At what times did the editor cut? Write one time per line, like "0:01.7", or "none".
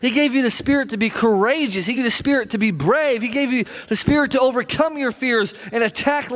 0:02.0